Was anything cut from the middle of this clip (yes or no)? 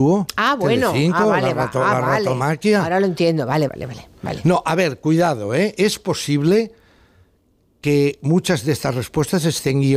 yes